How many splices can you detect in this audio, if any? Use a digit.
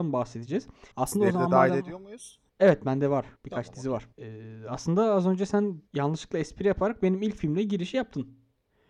5